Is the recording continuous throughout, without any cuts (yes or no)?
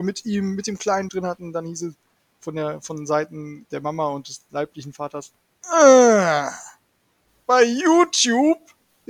no